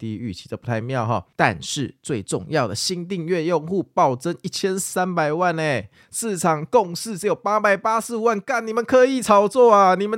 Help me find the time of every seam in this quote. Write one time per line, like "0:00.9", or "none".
0:01.3

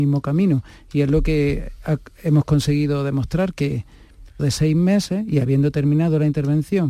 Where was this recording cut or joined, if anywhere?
0:04.4

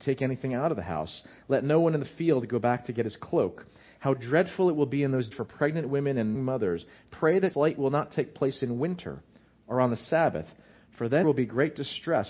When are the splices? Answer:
0:05.3
0:06.4
0:07.5
0:11.2

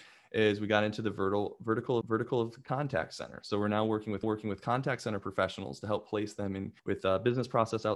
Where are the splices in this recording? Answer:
0:02.0
0:04.2
0:06.8

